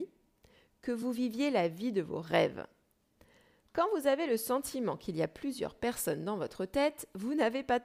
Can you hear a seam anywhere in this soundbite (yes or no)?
no